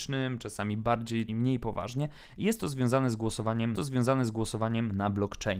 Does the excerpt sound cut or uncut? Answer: cut